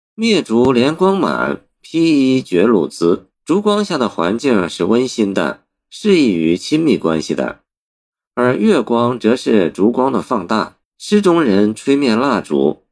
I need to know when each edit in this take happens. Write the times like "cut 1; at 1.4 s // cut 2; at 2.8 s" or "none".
cut 1; at 3.3 s // cut 2; at 10.8 s

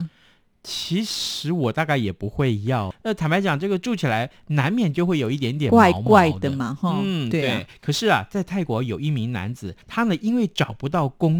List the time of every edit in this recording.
cut 1; at 9.8 s

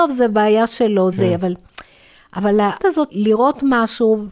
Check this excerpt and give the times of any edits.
cut 1; at 1.1 s // cut 2; at 2.8 s // cut 3; at 3.1 s

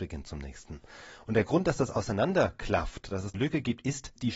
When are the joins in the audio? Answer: cut 1; at 3.3 s

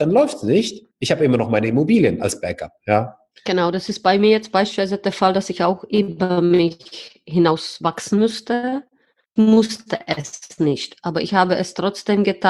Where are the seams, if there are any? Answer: cut 1; at 0.9 s // cut 2; at 3.3 s // cut 3; at 9.4 s

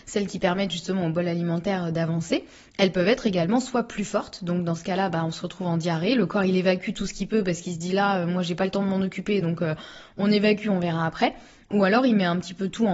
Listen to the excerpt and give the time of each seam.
none

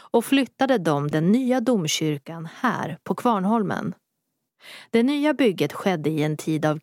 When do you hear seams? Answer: cut 1; at 1.1 s

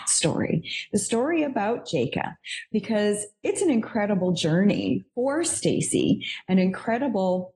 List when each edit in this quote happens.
cut 1; at 5.1 s

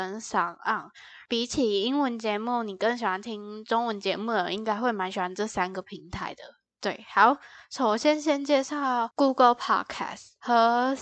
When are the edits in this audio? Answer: none

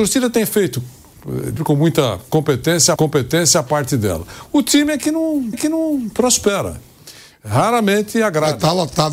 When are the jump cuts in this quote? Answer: cut 1; at 1.6 s // cut 2; at 3.0 s // cut 3; at 5.5 s

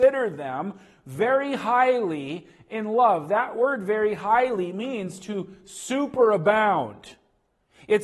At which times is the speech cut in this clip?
none

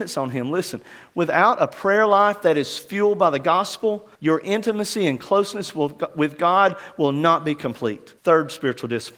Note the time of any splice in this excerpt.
cut 1; at 4.1 s // cut 2; at 8.2 s

